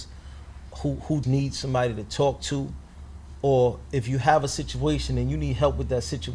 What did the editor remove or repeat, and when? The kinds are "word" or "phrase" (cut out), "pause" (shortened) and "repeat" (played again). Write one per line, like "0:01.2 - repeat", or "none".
0:01.2 - word